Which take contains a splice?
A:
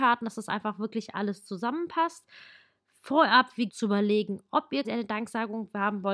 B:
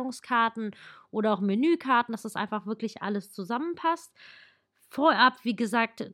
A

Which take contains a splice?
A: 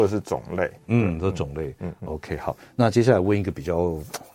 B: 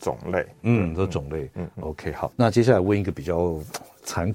B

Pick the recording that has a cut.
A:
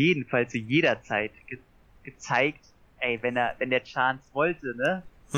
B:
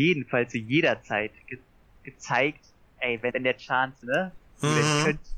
B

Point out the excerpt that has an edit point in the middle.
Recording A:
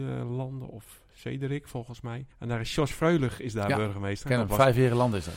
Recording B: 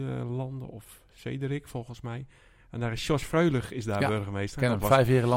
A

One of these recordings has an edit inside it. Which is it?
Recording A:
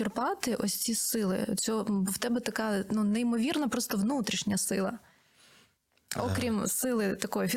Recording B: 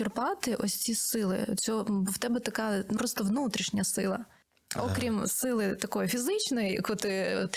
B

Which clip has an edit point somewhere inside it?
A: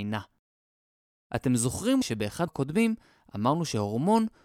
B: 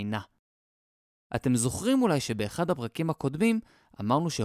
A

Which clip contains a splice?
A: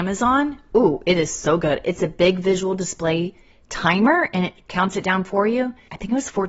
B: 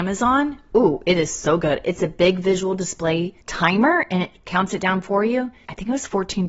B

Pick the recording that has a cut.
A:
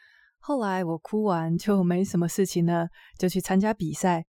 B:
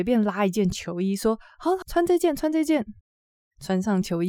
B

